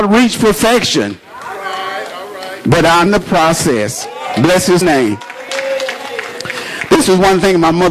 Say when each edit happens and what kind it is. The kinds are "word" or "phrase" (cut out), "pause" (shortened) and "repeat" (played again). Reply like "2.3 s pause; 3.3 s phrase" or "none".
3.1 s word; 4.8 s word

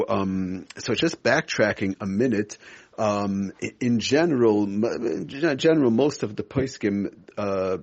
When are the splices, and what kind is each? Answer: none

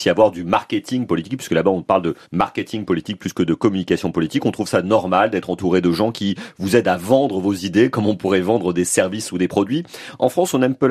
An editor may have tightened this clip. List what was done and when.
2.2 s pause

